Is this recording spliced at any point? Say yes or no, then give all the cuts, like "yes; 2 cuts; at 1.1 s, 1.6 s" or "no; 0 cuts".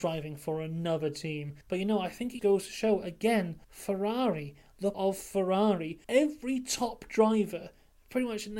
yes; 5 cuts; at 1.6 s, 2.4 s, 3.6 s, 4.9 s, 6.0 s